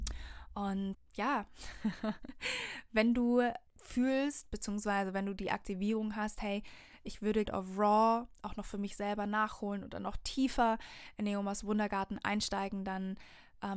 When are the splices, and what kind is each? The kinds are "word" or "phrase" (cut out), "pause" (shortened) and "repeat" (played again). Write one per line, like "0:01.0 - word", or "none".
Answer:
0:00.9 - word
0:03.7 - pause
0:07.5 - phrase